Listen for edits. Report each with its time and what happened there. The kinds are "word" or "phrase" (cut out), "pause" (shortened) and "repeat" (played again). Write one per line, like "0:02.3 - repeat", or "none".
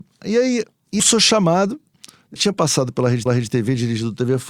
0:01.0 - phrase
0:02.4 - word
0:03.3 - repeat